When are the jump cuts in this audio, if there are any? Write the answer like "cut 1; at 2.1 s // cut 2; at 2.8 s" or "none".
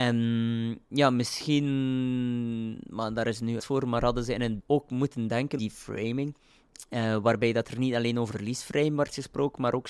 cut 1; at 3.6 s // cut 2; at 4.6 s // cut 3; at 5.6 s // cut 4; at 8.3 s